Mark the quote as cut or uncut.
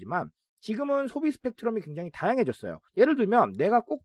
cut